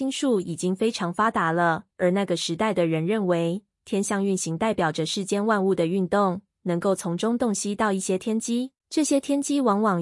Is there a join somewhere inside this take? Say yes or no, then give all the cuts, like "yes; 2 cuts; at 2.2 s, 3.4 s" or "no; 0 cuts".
yes; 2 cuts; at 1.9 s, 8.8 s